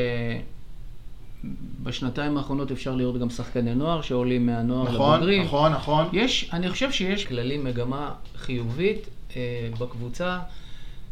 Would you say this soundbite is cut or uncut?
cut